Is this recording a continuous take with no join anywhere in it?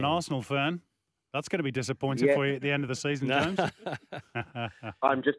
yes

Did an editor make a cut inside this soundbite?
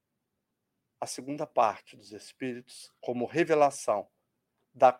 yes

